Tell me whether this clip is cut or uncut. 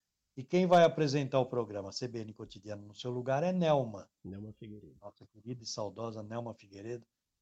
uncut